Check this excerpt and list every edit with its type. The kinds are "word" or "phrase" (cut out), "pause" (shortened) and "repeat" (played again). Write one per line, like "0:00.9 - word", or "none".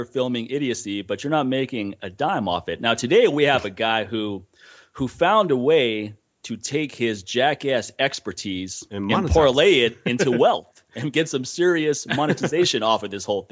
none